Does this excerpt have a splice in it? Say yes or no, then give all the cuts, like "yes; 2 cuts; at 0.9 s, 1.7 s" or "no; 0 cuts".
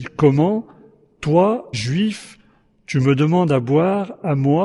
yes; 1 cut; at 1.7 s